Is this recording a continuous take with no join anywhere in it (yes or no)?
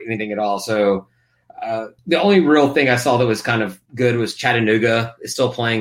no